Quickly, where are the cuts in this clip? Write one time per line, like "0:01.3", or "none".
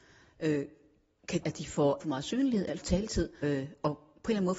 0:01.4
0:02.0
0:02.8
0:03.4